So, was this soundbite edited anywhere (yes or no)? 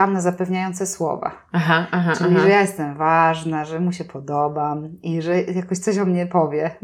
no